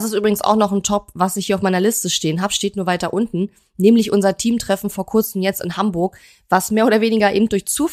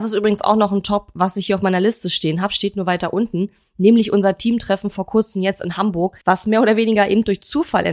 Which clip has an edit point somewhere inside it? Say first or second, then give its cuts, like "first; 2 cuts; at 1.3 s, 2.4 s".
second; 1 cut; at 6.2 s